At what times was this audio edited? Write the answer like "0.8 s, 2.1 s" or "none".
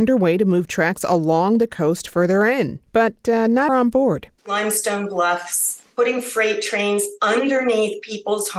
2.9 s, 3.7 s, 4.4 s, 5.9 s